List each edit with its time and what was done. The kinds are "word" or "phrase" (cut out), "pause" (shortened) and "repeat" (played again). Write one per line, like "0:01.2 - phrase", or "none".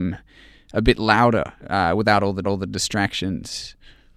0:01.6 - pause
0:02.4 - repeat